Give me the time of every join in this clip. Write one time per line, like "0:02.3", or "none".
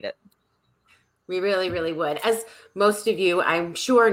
none